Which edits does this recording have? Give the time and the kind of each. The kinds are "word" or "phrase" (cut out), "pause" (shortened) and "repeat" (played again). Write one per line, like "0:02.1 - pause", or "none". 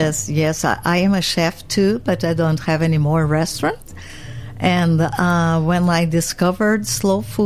none